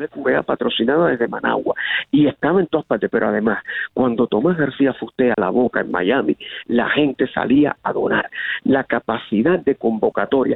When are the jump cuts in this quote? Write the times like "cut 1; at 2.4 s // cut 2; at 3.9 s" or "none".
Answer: cut 1; at 5.3 s